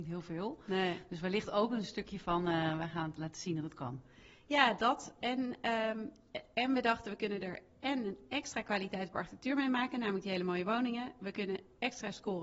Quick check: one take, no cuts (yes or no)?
yes